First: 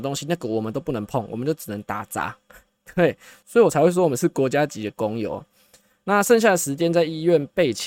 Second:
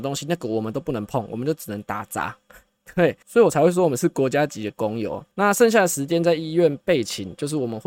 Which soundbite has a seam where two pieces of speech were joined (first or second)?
second